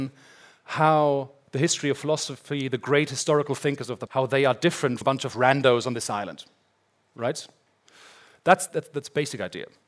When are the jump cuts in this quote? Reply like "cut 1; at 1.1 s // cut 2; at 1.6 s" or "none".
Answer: cut 1; at 4.1 s // cut 2; at 5.0 s // cut 3; at 8.7 s